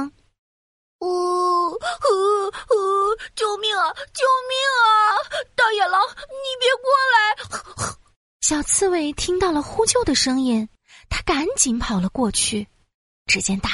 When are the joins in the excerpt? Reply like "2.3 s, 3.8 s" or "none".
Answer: none